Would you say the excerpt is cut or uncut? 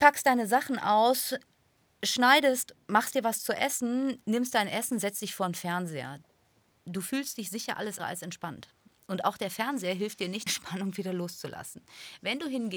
cut